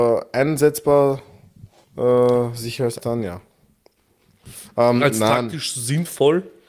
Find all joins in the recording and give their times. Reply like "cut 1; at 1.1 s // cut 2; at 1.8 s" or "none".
cut 1; at 1.8 s // cut 2; at 3.0 s